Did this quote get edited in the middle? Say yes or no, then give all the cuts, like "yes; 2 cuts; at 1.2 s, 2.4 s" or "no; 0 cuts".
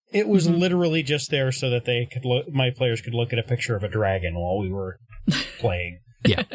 no; 0 cuts